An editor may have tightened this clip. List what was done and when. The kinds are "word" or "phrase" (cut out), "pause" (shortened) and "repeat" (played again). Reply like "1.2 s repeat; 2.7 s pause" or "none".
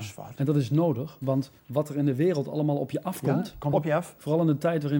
1.6 s pause; 3.7 s phrase

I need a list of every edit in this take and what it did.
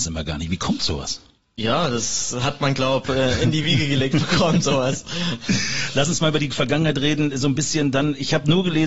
none

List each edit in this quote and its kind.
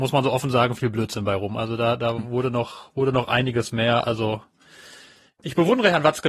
none

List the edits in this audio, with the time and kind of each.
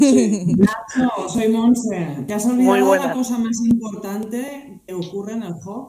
4.9 s word

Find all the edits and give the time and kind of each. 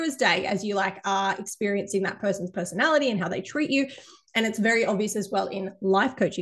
none

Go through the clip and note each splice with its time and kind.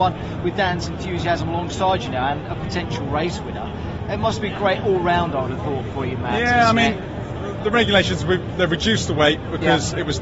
none

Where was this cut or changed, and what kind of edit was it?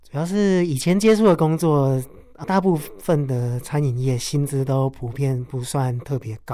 2.4 s word

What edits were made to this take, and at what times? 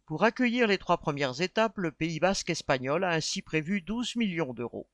none

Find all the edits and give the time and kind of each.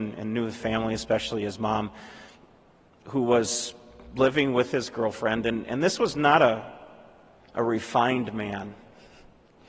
none

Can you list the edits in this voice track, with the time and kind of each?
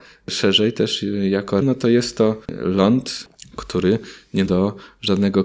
1.6 s word; 2.4 s pause; 4.5 s word

